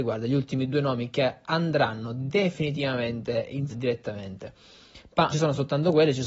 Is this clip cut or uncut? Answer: cut